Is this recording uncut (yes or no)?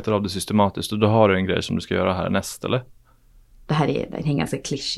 yes